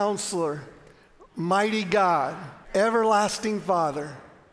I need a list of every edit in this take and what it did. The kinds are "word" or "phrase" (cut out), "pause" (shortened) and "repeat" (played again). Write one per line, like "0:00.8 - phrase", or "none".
0:02.6 - pause